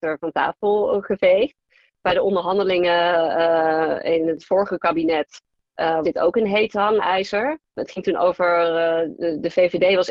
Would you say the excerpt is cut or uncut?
cut